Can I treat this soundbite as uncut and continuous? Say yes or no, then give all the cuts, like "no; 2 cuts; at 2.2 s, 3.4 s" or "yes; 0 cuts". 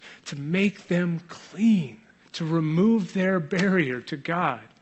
no; 1 cut; at 2.1 s